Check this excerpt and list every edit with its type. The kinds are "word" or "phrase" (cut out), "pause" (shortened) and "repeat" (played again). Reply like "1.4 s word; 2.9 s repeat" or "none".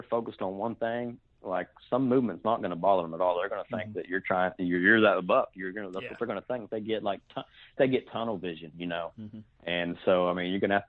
6.7 s word; 7.8 s word